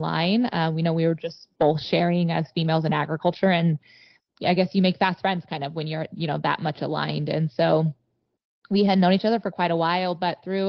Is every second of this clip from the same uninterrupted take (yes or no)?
yes